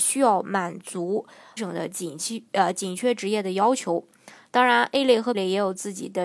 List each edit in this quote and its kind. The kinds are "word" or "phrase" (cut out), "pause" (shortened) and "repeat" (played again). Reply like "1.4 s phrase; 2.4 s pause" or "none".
1.6 s word; 5.3 s word